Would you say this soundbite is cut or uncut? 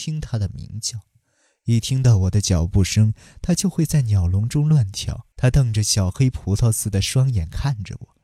cut